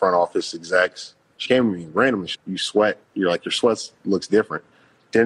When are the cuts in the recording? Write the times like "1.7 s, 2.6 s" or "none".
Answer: 1.5 s, 2.3 s, 3.0 s